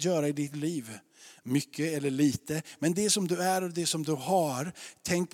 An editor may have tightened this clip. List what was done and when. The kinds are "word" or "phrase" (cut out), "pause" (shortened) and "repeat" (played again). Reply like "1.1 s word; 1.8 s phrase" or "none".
none